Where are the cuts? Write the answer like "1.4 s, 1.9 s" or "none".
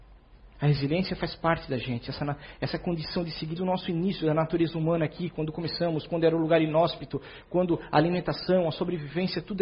3.6 s